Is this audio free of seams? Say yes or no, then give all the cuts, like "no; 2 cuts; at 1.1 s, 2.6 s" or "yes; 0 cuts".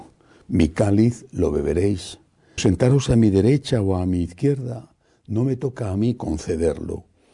no; 1 cut; at 2.6 s